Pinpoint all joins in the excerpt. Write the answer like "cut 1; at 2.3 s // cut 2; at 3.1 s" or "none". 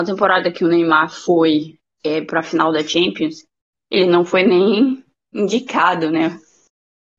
none